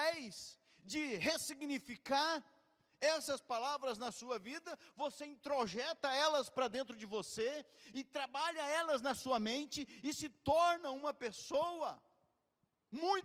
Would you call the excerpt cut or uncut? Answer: uncut